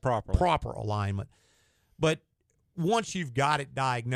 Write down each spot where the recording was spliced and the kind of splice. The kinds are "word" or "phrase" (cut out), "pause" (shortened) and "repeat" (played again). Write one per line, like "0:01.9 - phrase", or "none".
none